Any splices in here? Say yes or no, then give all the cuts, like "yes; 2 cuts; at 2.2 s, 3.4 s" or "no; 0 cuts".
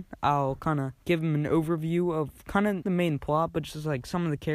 yes; 2 cuts; at 1.0 s, 2.8 s